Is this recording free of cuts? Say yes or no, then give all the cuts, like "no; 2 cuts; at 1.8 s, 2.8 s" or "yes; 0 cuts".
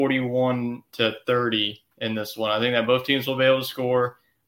no; 1 cut; at 1.9 s